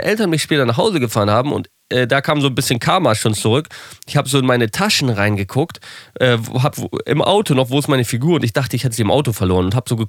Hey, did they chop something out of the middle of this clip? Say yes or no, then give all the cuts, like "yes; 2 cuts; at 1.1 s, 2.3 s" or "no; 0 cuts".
yes; 1 cut; at 6.7 s